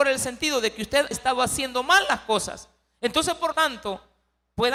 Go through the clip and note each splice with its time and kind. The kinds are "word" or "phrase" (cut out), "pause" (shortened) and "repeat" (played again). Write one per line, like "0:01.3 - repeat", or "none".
0:01.1 - word
0:03.5 - word